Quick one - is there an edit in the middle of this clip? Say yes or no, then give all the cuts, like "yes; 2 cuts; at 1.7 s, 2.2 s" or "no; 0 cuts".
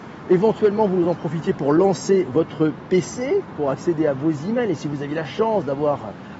no; 0 cuts